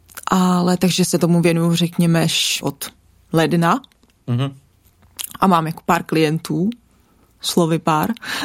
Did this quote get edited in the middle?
yes; 1 cut; at 2.6 s

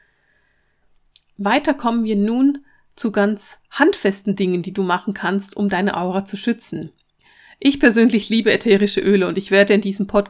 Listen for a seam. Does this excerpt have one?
no; 0 cuts

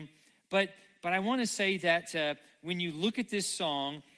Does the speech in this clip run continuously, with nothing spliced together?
yes; 0 cuts

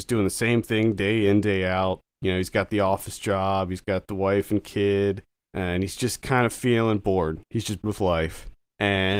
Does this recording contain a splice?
yes; 1 cut; at 7.8 s

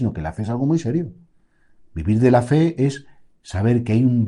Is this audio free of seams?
yes; 0 cuts

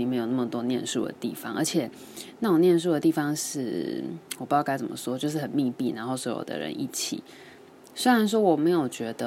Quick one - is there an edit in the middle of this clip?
no; 0 cuts

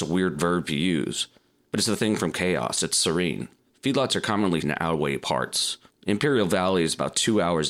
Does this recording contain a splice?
yes; 2 cuts; at 2.0 s, 4.6 s

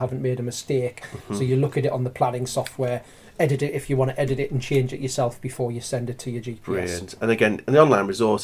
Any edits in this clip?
no; 0 cuts

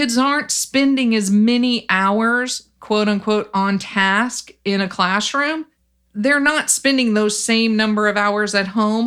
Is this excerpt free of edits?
yes; 0 cuts

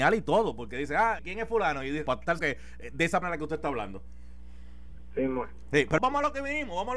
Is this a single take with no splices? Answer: no; 5 cuts; at 1.2 s, 2.1 s, 2.4 s, 3.2 s, 6.0 s

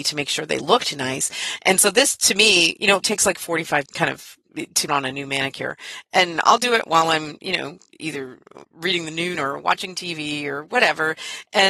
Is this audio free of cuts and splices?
no; 5 cuts; at 3.0 s, 3.9 s, 4.9 s, 8.6 s, 9.4 s

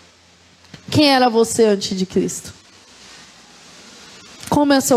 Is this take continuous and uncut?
yes; 0 cuts

